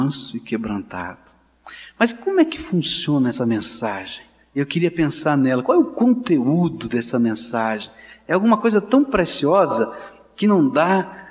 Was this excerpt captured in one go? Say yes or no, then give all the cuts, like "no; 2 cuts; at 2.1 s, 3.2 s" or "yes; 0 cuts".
yes; 0 cuts